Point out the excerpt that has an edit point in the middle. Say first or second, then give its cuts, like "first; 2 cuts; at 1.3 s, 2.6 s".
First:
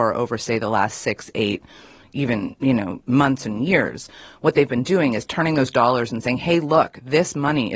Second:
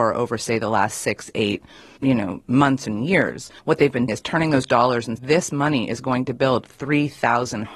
second; 4 cuts; at 2.0 s, 3.6 s, 4.1 s, 5.2 s